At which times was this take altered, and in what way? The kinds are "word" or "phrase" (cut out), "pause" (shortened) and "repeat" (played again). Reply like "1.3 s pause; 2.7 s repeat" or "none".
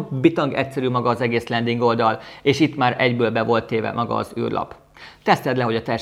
none